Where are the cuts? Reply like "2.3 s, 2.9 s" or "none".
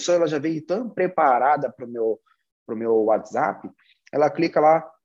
none